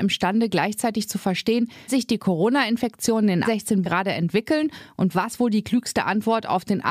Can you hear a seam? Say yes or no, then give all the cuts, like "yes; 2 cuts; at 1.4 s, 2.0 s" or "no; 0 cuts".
yes; 3 cuts; at 1.9 s, 3.4 s, 3.8 s